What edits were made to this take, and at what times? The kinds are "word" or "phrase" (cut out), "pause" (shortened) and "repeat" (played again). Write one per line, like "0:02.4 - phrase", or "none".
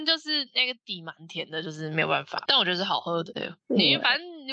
0:02.5 - phrase